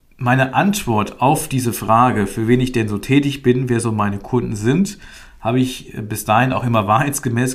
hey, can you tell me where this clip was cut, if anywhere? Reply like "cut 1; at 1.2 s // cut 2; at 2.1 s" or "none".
none